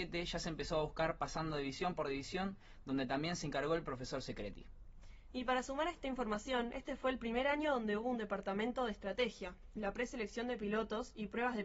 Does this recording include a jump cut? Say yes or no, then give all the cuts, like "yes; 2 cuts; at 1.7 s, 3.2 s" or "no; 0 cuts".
no; 0 cuts